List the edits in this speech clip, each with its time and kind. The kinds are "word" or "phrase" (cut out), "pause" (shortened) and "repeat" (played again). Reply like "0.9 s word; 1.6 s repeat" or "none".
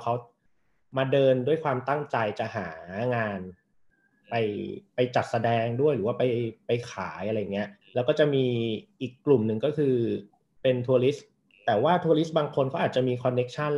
7.8 s pause